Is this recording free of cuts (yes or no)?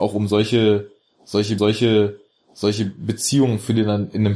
no